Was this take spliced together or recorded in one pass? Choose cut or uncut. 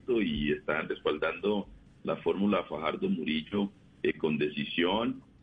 uncut